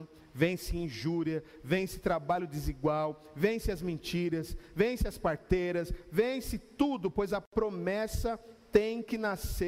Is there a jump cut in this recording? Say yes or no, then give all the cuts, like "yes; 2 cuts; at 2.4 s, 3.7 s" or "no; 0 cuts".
no; 0 cuts